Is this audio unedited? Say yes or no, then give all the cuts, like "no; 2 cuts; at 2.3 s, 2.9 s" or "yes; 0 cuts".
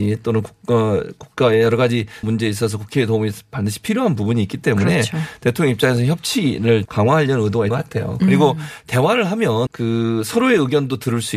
no; 4 cuts; at 2.2 s, 6.9 s, 7.7 s, 9.7 s